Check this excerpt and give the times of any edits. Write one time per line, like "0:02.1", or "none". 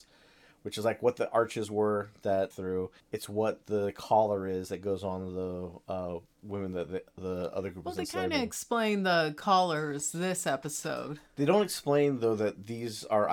0:02.5
0:03.0